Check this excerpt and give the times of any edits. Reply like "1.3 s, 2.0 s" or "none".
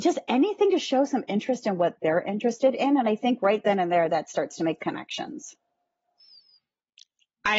4.8 s